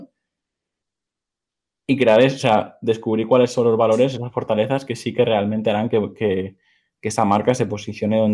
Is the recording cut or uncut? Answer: uncut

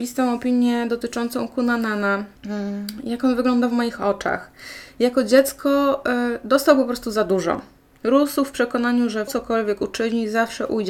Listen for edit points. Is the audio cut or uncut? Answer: cut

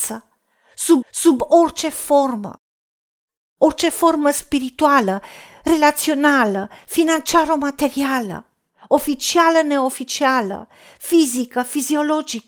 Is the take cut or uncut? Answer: cut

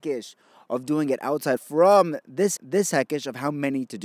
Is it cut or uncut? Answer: cut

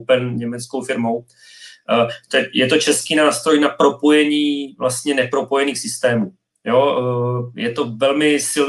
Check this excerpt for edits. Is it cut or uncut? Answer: uncut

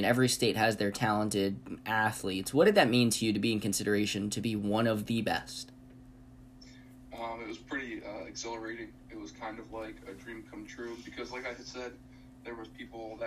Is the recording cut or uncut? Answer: uncut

